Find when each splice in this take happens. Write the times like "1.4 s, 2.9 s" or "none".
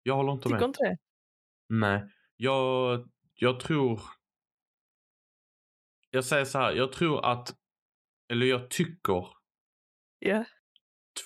3.3 s